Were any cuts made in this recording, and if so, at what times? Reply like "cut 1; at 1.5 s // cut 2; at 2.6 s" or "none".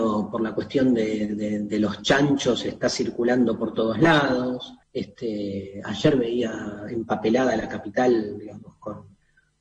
cut 1; at 4.8 s